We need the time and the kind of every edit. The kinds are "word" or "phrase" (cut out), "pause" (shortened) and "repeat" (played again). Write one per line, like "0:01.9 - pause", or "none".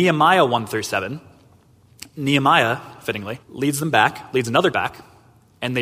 0:03.4 - pause
0:04.7 - word